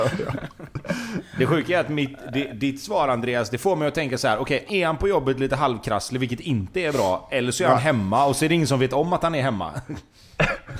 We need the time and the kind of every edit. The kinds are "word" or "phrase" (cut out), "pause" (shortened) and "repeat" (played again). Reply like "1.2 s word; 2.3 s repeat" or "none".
4.7 s word